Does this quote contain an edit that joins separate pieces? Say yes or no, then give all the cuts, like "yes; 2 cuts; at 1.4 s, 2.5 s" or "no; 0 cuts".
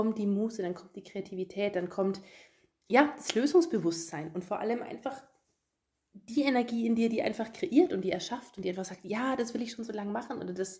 no; 0 cuts